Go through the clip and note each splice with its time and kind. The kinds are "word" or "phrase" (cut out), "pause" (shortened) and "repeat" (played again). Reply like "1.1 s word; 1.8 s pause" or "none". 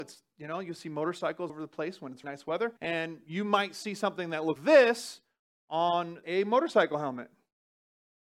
1.5 s word; 2.2 s word; 2.8 s pause; 4.6 s word; 6.2 s phrase

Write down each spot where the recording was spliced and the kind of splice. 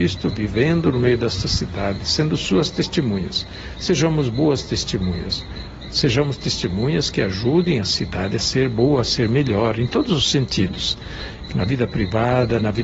none

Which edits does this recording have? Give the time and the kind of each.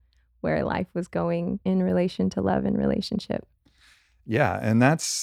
1.6 s word

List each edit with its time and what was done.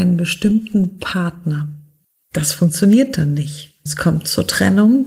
1.0 s word; 2.2 s pause

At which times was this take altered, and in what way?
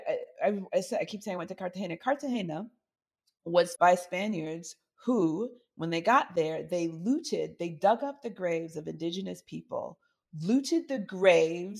3.8 s word

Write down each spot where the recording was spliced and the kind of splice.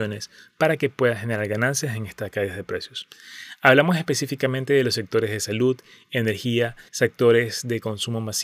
6.9 s pause

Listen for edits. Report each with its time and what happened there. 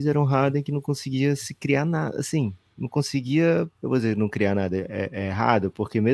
3.7 s pause

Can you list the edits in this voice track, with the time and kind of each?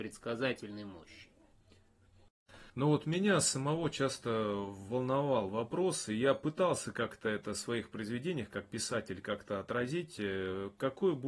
2.7 s pause

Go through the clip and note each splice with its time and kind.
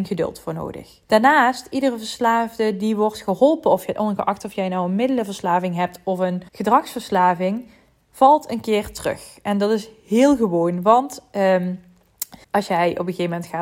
1.0 s pause; 6.5 s pause; 12.4 s pause

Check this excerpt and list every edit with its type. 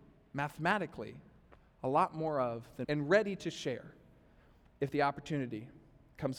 2.8 s word

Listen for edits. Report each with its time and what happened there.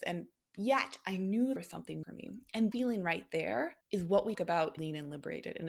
1.6 s phrase; 2.0 s word; 2.7 s word; 3.8 s pause; 4.3 s word; 4.8 s word

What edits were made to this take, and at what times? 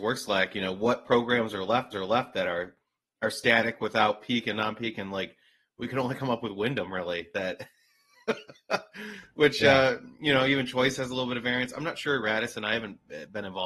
1.9 s repeat

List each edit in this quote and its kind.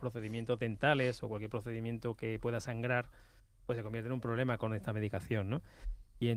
none

